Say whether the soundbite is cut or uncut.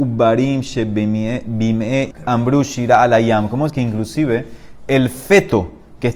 cut